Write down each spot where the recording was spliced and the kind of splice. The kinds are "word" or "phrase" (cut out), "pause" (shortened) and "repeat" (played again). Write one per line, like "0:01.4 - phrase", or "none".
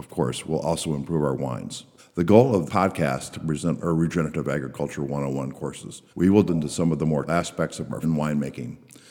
0:02.0 - pause
0:02.7 - word
0:03.3 - phrase
0:03.8 - word
0:06.1 - pause
0:06.5 - word
0:07.3 - word
0:08.0 - word